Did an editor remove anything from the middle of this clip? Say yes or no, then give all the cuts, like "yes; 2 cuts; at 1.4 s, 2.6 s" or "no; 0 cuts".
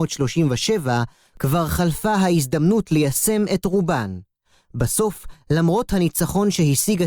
no; 0 cuts